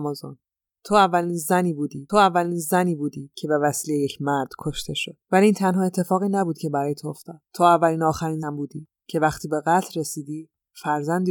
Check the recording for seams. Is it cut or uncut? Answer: cut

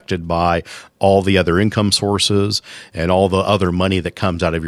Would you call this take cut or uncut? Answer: uncut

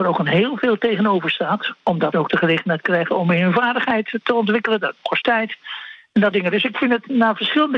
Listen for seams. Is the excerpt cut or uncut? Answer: cut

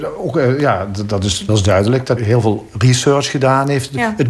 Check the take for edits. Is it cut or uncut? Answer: cut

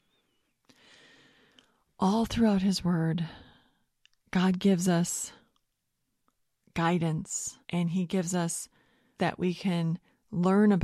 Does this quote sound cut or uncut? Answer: cut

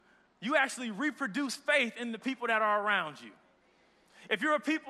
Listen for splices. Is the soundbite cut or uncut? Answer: uncut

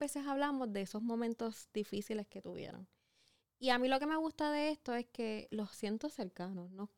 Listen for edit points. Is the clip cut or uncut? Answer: uncut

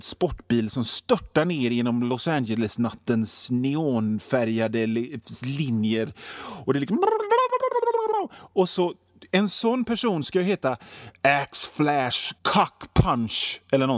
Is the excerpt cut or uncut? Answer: cut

